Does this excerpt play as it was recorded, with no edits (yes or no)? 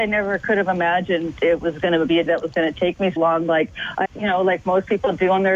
no